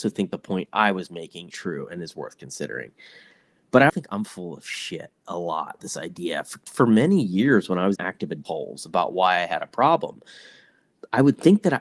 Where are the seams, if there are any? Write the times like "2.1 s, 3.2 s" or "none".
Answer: 1.5 s, 3.9 s, 5.8 s, 6.7 s, 8.0 s